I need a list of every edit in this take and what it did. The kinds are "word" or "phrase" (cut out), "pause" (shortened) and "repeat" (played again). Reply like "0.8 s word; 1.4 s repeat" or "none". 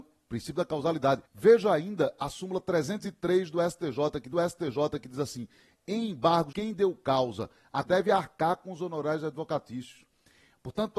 1.2 s pause; 4.3 s repeat; 6.5 s phrase; 7.8 s phrase